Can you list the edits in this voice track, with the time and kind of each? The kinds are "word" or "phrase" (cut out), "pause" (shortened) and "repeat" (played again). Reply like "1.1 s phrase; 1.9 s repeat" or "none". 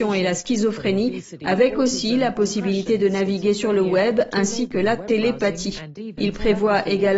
none

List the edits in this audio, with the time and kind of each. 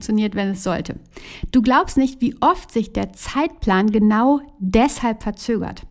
none

